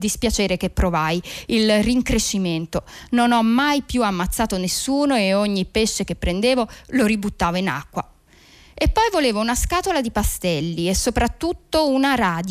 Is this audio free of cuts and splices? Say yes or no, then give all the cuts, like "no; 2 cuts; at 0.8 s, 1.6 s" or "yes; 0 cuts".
yes; 0 cuts